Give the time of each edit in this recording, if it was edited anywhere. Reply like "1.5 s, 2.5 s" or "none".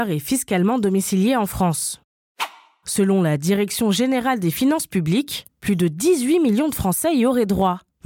none